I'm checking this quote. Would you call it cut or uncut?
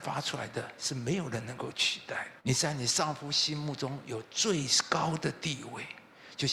cut